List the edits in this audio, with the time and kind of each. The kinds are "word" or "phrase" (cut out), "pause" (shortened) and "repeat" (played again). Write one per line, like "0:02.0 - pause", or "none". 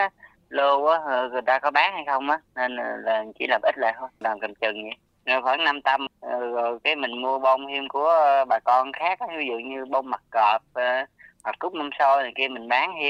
none